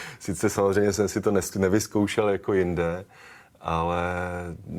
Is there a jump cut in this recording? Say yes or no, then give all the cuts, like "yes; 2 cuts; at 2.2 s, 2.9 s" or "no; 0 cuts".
no; 0 cuts